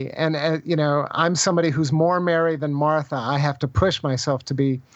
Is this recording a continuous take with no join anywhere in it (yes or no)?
yes